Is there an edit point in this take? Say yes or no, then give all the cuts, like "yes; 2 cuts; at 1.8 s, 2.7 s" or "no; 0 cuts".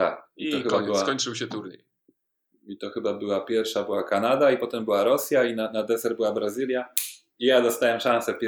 no; 0 cuts